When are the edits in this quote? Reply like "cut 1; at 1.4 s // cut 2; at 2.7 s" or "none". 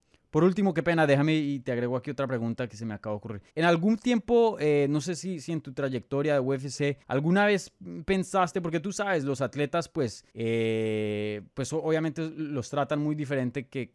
cut 1; at 2.7 s // cut 2; at 3.5 s // cut 3; at 7.0 s // cut 4; at 10.3 s